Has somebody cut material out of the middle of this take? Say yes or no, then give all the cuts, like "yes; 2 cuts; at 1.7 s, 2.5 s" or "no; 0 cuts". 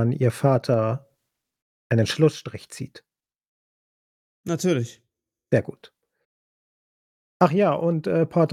no; 0 cuts